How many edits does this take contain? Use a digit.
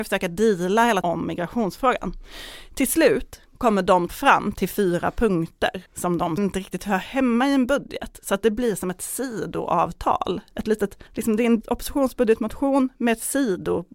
6